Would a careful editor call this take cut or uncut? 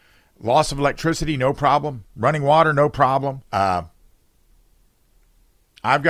cut